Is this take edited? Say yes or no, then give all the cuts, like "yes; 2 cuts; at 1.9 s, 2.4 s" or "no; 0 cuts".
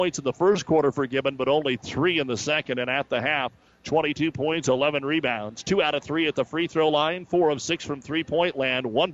no; 0 cuts